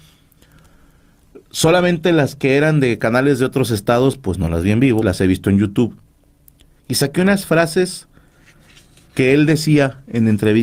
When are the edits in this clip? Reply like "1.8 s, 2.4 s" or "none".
5.0 s

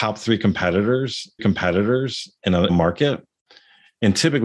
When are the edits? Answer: 1.4 s, 2.7 s

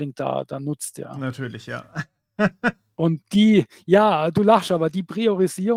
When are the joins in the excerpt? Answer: none

